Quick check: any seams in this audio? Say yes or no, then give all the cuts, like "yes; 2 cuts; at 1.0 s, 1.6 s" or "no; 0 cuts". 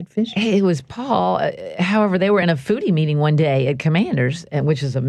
no; 0 cuts